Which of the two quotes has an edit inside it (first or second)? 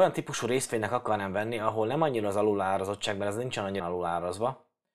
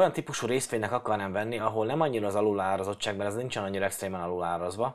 first